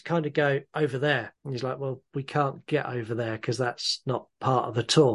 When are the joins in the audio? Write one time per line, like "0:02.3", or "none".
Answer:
0:01.4